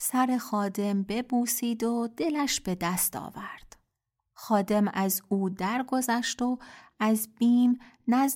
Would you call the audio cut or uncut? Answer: uncut